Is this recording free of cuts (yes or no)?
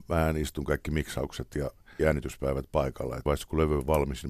no